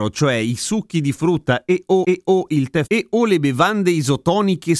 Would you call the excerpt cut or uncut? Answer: cut